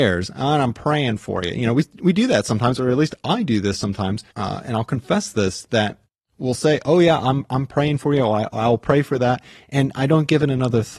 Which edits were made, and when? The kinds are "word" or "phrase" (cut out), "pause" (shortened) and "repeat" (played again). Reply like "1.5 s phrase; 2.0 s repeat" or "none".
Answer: 4.3 s pause